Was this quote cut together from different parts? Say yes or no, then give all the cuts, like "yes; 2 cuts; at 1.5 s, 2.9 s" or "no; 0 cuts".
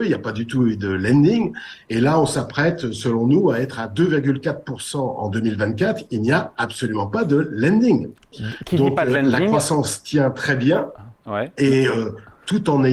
yes; 1 cut; at 11.2 s